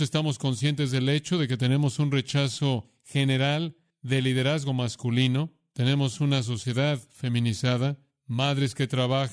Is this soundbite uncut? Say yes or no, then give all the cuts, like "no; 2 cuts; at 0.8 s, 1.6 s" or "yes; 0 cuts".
yes; 0 cuts